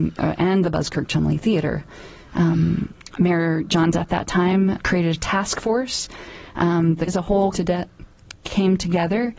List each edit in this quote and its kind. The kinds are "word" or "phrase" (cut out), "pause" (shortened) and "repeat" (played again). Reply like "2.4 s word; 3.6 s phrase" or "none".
3.9 s word; 4.8 s word; 7.1 s word; 7.5 s word